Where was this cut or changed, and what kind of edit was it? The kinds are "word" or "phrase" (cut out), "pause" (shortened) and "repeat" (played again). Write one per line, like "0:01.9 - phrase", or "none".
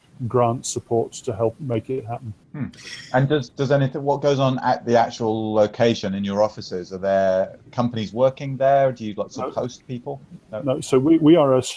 0:02.4 - pause